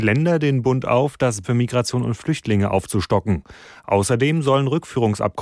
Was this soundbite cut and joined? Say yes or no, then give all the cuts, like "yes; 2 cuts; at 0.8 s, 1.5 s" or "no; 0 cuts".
yes; 1 cut; at 1.4 s